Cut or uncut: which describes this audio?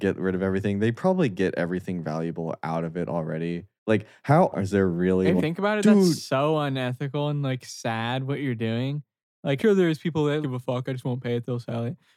cut